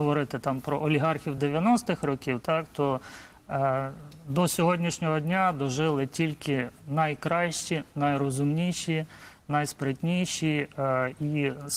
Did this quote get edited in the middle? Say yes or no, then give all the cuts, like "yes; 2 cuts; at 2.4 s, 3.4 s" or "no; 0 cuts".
no; 0 cuts